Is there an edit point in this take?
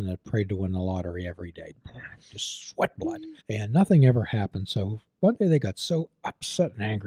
yes; 1 cut; at 3.4 s

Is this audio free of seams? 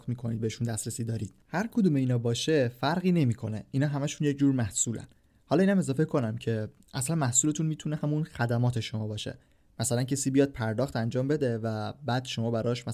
yes; 0 cuts

